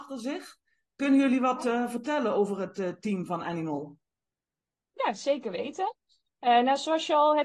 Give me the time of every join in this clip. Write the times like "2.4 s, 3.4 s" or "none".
none